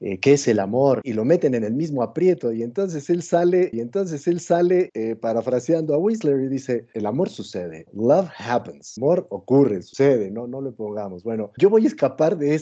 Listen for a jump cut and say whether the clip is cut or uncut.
cut